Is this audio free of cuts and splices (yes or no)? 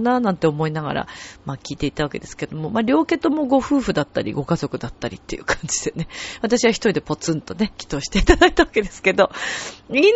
no